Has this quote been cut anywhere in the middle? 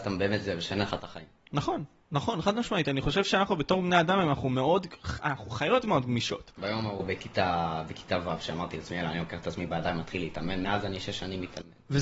no; 0 cuts

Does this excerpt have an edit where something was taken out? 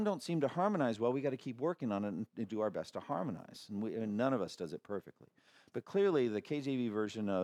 no; 0 cuts

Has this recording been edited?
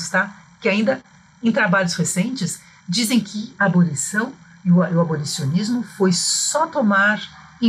no; 0 cuts

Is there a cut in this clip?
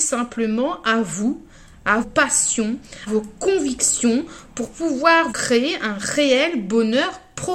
yes; 3 cuts; at 2.0 s, 3.1 s, 5.3 s

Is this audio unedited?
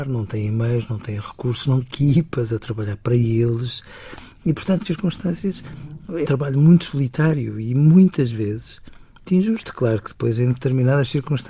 no; 4 cuts; at 1.8 s, 4.9 s, 6.3 s, 9.3 s

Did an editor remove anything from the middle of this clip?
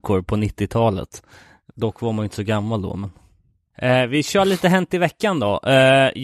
no; 0 cuts

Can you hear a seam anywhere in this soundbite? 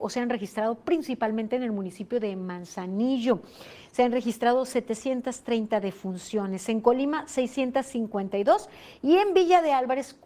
no; 0 cuts

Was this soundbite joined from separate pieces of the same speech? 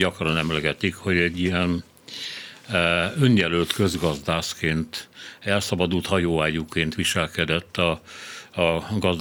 no; 0 cuts

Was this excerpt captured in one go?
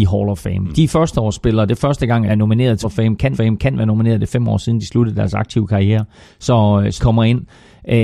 no; 5 cuts; at 2.3 s, 2.8 s, 3.3 s, 6.2 s, 7.0 s

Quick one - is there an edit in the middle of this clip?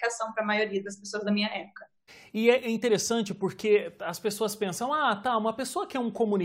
yes; 1 cut; at 2.1 s

